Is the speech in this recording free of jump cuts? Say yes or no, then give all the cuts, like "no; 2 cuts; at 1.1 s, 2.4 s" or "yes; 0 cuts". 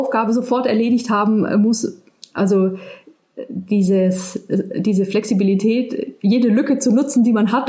yes; 0 cuts